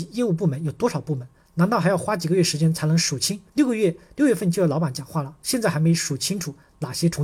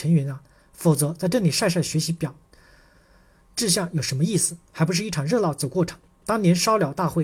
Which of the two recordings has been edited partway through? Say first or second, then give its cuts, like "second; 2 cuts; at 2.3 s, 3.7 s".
first; 1 cut; at 3.5 s